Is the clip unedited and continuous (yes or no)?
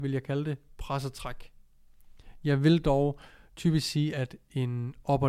yes